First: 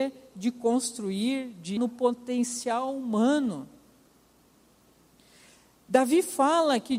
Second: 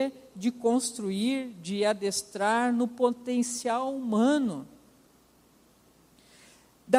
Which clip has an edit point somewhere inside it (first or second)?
first